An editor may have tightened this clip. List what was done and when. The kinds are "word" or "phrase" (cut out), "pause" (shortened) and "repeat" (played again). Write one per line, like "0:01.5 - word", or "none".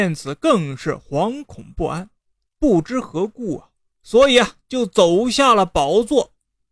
0:03.9 - pause